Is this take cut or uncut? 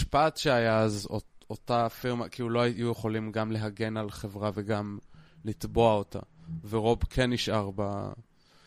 uncut